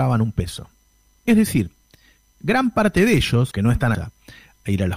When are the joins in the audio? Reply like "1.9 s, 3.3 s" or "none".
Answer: 3.5 s, 3.9 s